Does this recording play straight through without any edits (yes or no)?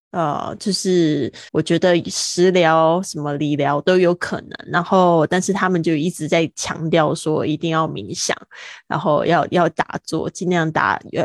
no